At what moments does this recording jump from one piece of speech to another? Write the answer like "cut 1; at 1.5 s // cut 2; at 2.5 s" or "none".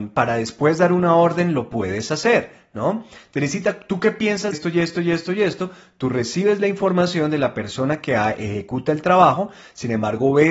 cut 1; at 4.5 s

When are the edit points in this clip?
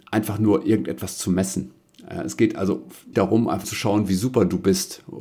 cut 1; at 3.1 s // cut 2; at 3.6 s

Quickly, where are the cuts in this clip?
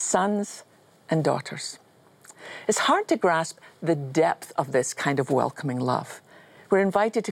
none

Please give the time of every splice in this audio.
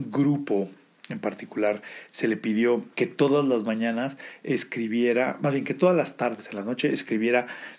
cut 1; at 2.9 s

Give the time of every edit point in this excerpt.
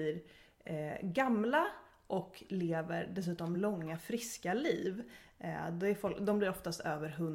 none

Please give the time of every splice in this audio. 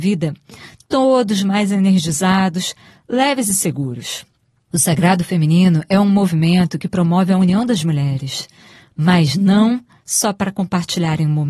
none

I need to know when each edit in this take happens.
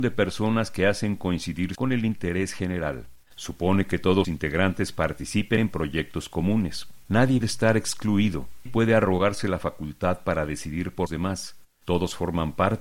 cut 1; at 1.8 s // cut 2; at 3.2 s // cut 3; at 4.2 s // cut 4; at 5.6 s // cut 5; at 7.4 s // cut 6; at 8.7 s // cut 7; at 11.1 s

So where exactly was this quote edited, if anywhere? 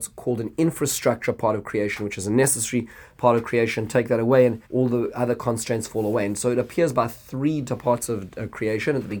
cut 1; at 4.6 s

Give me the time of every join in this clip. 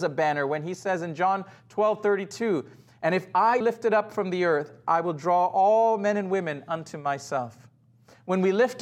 cut 1; at 3.6 s

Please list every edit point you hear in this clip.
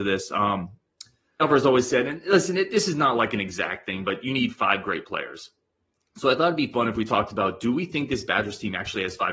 cut 1; at 1.4 s

